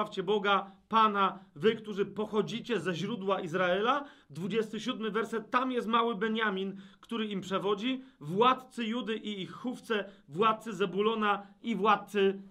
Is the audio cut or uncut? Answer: uncut